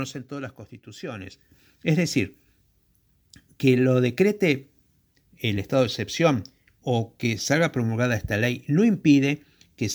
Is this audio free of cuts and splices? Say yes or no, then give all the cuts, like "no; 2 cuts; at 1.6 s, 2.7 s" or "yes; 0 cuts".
yes; 0 cuts